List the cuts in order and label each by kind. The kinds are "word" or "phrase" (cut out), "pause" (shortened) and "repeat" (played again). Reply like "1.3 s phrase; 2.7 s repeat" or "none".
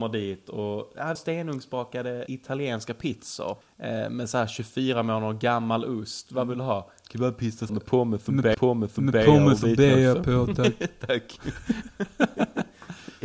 1.2 s word; 2.3 s word; 3.6 s pause; 7.7 s word; 8.5 s repeat